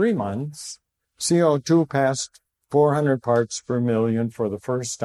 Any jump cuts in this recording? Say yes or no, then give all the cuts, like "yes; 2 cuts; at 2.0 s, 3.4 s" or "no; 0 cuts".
no; 0 cuts